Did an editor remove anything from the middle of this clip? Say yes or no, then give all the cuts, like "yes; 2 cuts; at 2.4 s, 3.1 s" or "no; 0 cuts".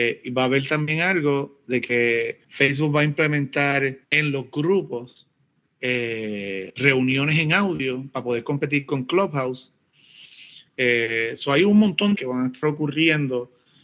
yes; 4 cuts; at 2.4 s, 4.0 s, 5.6 s, 12.2 s